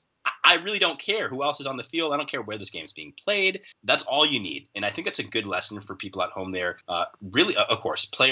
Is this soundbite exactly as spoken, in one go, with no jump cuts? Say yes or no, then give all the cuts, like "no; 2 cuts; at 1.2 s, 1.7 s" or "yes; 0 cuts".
no; 2 cuts; at 3.7 s, 6.8 s